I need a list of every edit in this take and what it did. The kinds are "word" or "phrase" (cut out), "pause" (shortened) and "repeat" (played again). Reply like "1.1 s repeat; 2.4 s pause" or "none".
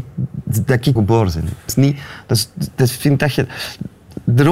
1.0 s word; 1.7 s word

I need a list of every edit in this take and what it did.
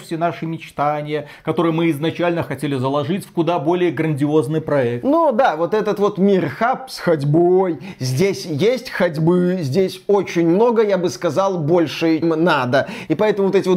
12.2 s word

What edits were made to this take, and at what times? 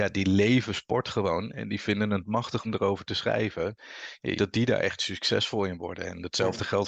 2.6 s word; 4.4 s word

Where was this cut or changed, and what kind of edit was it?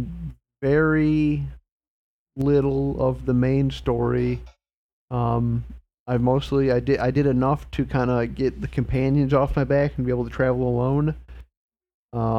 none

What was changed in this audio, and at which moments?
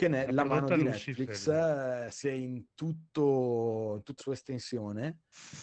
2.2 s word; 4.2 s word

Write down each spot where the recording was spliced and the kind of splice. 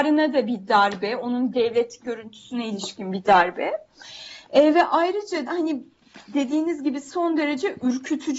1.5 s word; 5.5 s word

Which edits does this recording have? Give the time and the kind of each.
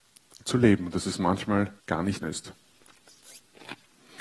1.8 s pause; 2.2 s phrase

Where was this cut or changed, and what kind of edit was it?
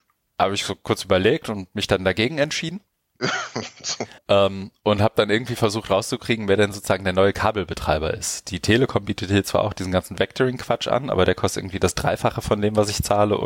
4.2 s pause

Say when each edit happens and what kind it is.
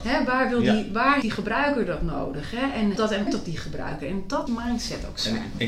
1.2 s word; 3.0 s word; 3.3 s word; 4.5 s word

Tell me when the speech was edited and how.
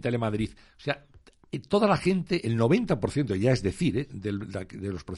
none

